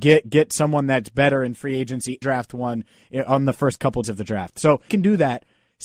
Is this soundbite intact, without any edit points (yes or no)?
no